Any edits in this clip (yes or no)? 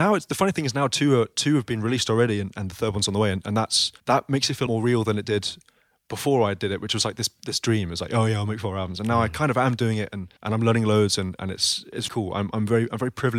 yes